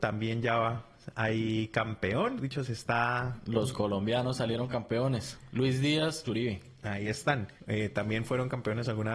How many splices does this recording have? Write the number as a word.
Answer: three